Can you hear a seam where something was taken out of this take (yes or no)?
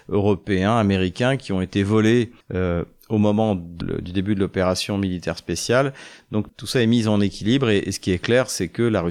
yes